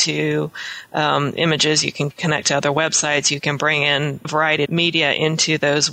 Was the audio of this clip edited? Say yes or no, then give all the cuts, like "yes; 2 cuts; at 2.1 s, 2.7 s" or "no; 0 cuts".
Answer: yes; 2 cuts; at 4.2 s, 4.7 s